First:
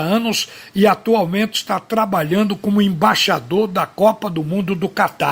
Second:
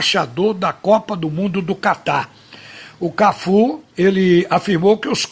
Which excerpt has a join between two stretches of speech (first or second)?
second